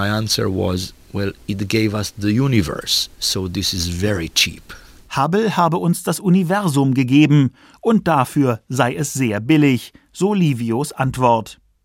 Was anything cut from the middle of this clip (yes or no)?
no